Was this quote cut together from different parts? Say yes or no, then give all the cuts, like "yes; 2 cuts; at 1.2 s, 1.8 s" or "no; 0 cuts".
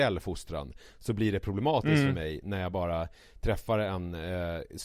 no; 0 cuts